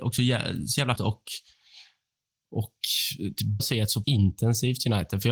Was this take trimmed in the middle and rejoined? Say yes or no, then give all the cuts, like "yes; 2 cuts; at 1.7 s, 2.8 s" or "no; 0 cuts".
yes; 3 cuts; at 1.0 s, 3.6 s, 4.0 s